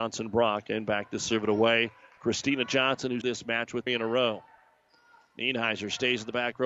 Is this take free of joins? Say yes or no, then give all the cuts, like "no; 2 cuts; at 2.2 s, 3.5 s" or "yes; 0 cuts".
no; 2 cuts; at 3.2 s, 3.9 s